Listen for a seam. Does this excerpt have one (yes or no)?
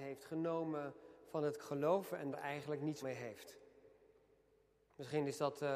yes